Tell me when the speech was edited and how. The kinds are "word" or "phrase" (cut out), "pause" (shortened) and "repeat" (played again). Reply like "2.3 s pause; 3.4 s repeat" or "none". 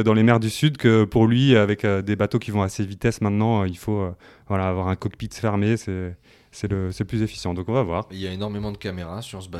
none

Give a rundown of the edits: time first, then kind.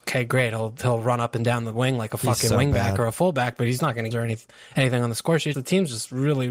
4.1 s phrase; 5.5 s word

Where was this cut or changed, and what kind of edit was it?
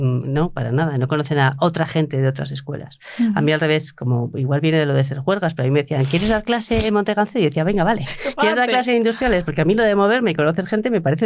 none

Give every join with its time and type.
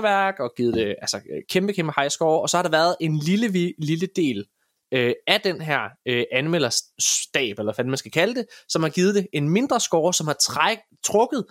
none

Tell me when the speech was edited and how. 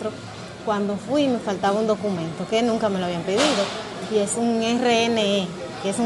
none

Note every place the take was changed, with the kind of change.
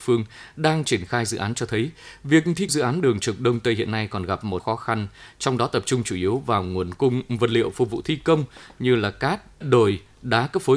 2.7 s word; 4.6 s word; 9.6 s word

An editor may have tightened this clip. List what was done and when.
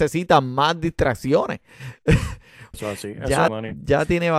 2.7 s word; 3.5 s word

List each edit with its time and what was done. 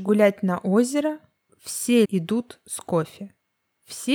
1.5 s word; 2.0 s word

